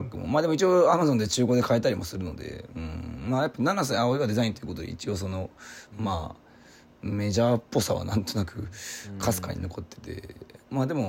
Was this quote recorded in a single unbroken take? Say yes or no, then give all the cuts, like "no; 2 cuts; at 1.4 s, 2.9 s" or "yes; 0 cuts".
yes; 0 cuts